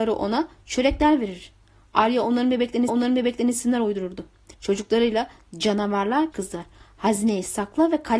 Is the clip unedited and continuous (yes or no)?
no